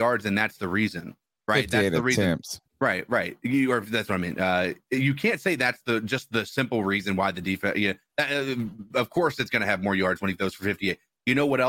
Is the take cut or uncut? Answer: uncut